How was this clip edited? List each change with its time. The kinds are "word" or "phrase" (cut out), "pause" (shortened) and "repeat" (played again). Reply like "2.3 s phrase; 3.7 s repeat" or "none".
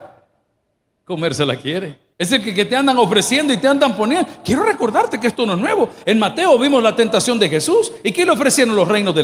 2.1 s pause